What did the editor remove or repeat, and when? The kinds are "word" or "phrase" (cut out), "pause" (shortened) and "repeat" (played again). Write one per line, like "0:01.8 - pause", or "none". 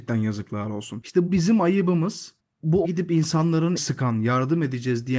0:01.3 - word
0:02.8 - word
0:03.8 - word